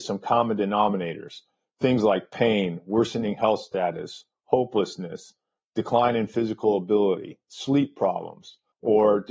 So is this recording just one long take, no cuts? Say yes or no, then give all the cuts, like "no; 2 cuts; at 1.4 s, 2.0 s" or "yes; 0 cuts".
yes; 0 cuts